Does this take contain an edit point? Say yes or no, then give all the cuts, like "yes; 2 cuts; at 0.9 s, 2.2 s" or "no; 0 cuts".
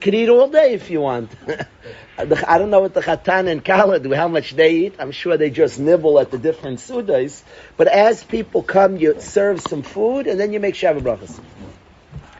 no; 0 cuts